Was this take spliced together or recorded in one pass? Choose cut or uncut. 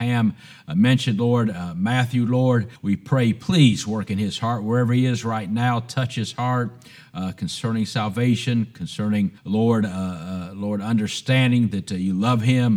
cut